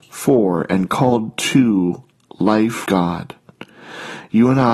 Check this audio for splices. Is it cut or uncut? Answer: cut